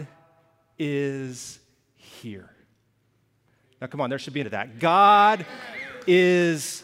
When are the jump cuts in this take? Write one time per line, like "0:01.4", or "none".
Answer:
0:04.4